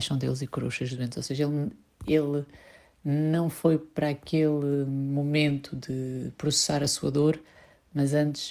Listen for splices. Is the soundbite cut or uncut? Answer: uncut